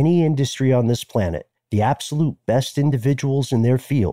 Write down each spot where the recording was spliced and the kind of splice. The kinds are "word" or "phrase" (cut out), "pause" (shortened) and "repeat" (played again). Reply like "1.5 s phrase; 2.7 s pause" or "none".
1.6 s pause